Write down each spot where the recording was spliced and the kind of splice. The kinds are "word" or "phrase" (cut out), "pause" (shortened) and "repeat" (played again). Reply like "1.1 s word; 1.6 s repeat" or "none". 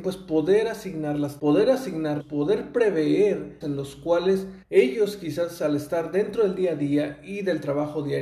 1.4 s word; 2.2 s word; 3.6 s word; 4.6 s pause